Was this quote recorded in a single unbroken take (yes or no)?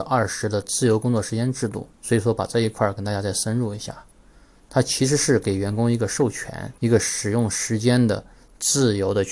no